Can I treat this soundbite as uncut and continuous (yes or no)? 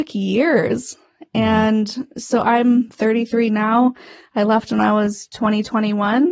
yes